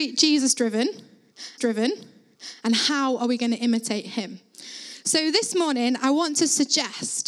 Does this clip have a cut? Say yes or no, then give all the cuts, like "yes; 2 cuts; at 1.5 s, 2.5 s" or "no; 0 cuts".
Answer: yes; 1 cut; at 1.6 s